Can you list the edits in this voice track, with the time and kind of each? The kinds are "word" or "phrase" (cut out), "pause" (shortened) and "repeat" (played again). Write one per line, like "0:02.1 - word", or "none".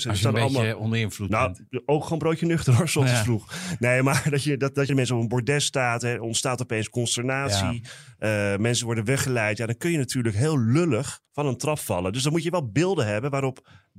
0:04.9 - phrase
0:11.3 - pause